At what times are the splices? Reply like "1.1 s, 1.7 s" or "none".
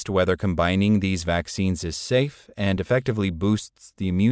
none

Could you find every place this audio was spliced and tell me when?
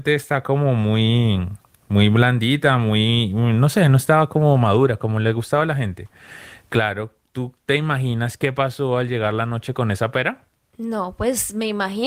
none

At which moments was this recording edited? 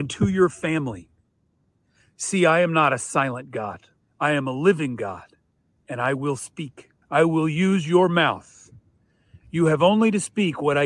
4.0 s, 7.0 s

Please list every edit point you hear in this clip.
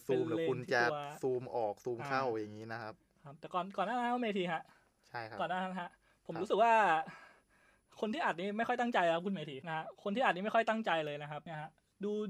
none

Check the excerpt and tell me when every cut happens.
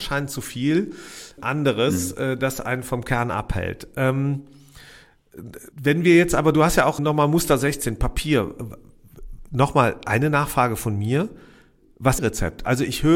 1.4 s, 5.7 s, 7.0 s, 12.2 s

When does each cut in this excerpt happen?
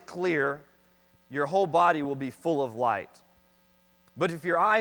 none

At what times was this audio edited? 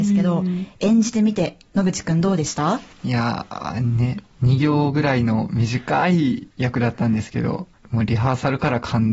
2.9 s, 6.5 s, 7.8 s

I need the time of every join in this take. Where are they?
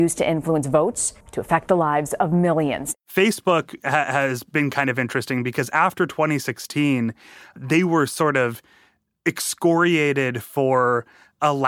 1.2 s

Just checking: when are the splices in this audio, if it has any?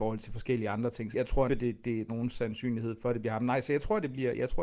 1.1 s, 1.5 s, 2.1 s

